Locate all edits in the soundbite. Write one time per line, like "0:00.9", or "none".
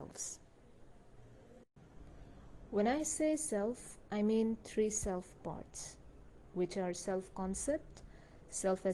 none

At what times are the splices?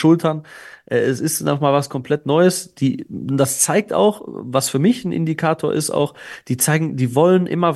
none

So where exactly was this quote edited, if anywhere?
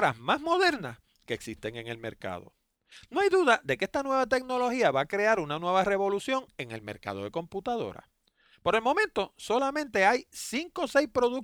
none

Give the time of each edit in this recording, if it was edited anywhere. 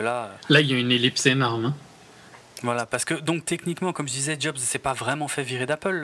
none

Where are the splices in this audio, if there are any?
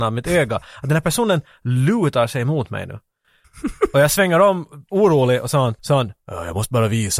0:05.8

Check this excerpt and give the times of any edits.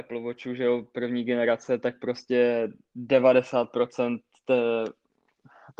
none

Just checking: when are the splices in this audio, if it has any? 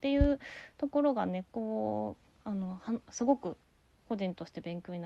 0:01.5

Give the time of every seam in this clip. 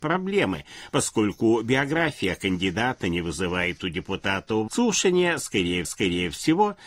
0:04.7
0:05.8

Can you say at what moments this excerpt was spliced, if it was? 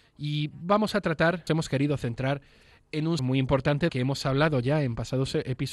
0:01.5
0:03.2
0:03.9

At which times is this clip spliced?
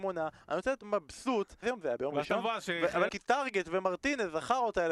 0:01.6
0:03.1

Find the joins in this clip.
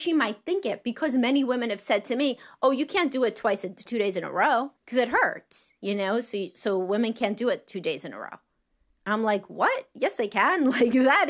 0:03.9
0:04.8

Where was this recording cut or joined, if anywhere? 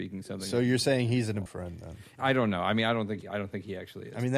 0:01.5
0:02.2
0:03.2

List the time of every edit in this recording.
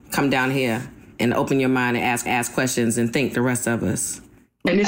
0:01.1
0:02.3
0:03.3

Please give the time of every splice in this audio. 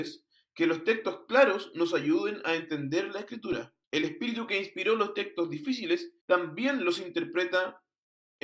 0:03.8
0:06.2

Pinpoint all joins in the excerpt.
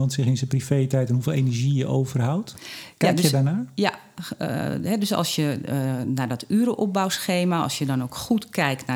none

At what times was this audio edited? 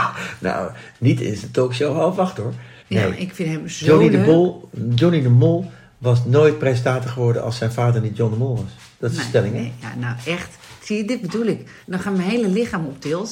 0:02.8
0:11.8

